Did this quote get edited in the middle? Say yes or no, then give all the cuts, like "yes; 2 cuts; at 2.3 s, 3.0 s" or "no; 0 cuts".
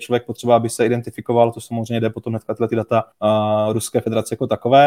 yes; 1 cut; at 3.1 s